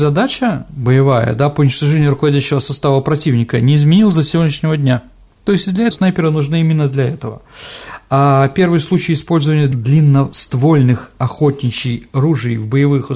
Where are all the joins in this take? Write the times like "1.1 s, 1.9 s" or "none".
5.9 s